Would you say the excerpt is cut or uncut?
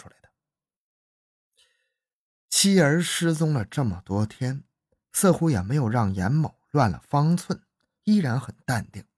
uncut